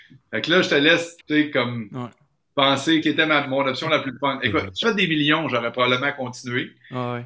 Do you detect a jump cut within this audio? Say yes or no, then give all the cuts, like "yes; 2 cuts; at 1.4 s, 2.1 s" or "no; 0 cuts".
yes; 3 cuts; at 1.2 s, 3.0 s, 4.8 s